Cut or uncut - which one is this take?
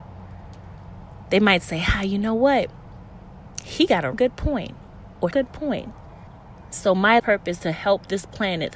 cut